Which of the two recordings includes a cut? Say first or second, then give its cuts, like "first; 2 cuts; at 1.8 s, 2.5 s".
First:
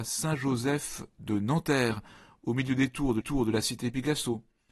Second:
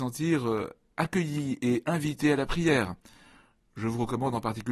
first; 1 cut; at 3.2 s